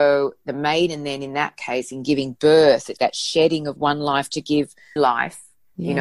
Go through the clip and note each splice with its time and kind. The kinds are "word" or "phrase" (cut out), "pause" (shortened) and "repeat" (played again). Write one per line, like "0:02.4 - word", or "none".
0:03.0 - word
0:05.0 - word

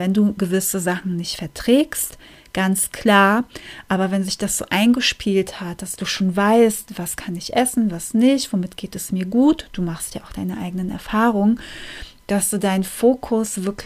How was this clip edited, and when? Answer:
none

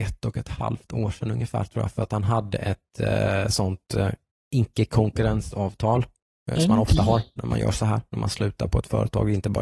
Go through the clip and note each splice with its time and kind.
0:04.3 - pause

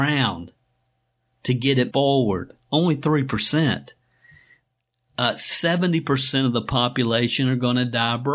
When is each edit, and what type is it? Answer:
0:01.9 - word

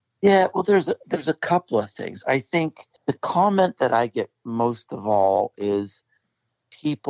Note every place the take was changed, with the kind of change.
0:03.0 - pause

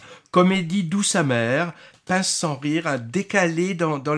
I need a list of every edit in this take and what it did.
none

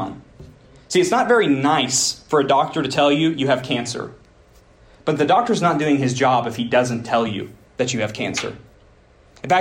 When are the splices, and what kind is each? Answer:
none

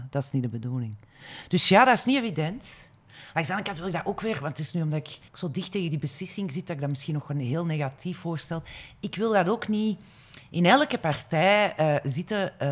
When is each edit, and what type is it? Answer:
0:05.3 - pause

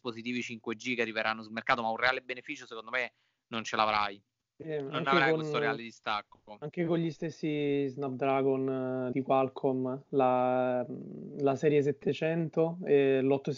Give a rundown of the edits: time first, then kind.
0:09.1 - word

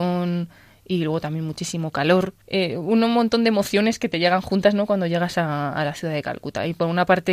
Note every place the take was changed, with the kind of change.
0:02.4 - pause

